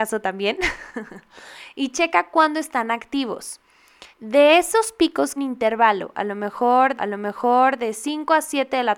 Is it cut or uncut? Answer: cut